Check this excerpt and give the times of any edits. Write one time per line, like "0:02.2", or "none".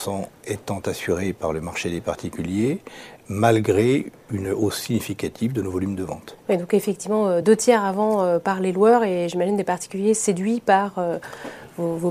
none